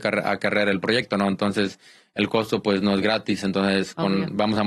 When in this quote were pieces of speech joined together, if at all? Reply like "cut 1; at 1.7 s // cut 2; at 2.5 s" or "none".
none